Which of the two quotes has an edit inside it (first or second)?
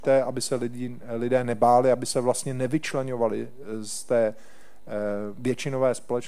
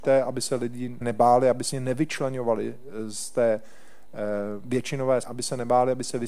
second